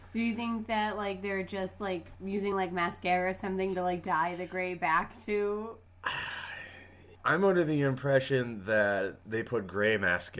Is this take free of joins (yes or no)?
yes